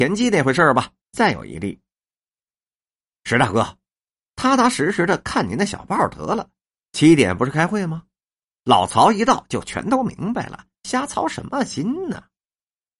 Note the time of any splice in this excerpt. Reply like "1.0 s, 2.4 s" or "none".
1.0 s